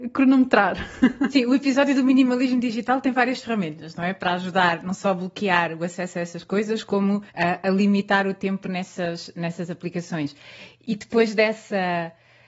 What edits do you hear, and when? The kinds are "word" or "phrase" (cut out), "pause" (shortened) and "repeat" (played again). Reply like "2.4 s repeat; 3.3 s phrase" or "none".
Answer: 7.3 s pause